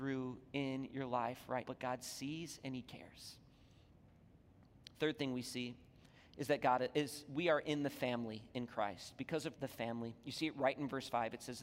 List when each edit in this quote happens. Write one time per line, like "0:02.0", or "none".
0:01.6
0:09.6